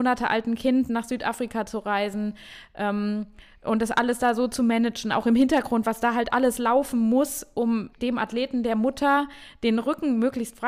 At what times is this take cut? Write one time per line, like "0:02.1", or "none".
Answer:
0:07.9